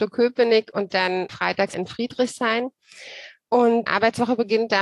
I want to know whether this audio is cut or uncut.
cut